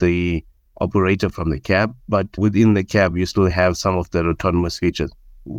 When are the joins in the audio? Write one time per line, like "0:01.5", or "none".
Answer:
none